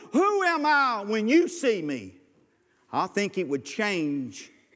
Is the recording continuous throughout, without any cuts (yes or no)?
yes